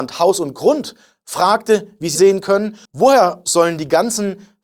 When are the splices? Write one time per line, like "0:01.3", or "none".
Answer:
0:02.2
0:02.9